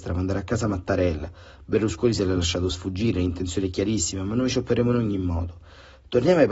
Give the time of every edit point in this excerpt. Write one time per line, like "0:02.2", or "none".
none